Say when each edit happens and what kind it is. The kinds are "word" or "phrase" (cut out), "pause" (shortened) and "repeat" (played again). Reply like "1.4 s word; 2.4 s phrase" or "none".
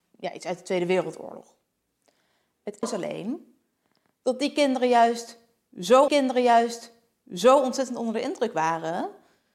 2.8 s phrase; 6.1 s repeat

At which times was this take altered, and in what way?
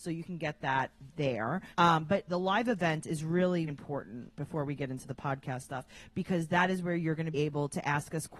1.7 s pause; 2.3 s word; 3.7 s word; 5.0 s word; 7.3 s word

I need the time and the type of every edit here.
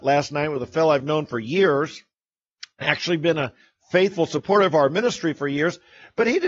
none

